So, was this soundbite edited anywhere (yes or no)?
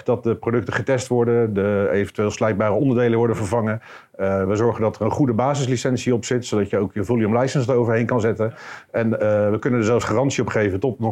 no